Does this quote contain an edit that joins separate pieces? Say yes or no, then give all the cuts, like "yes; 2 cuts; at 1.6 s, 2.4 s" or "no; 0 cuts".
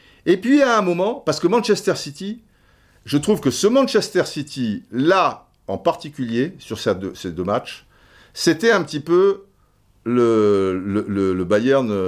no; 0 cuts